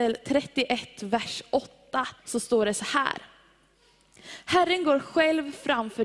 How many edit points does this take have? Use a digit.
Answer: 1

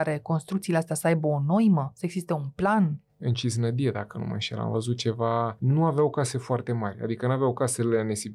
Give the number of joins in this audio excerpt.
0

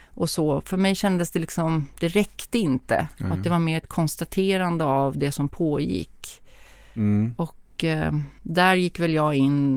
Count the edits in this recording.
1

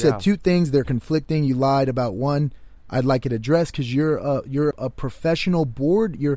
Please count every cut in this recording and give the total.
1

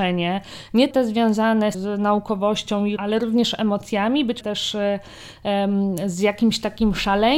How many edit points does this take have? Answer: 4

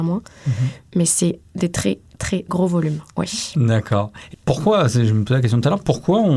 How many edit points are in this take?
2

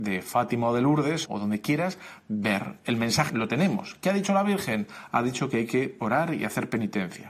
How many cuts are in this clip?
2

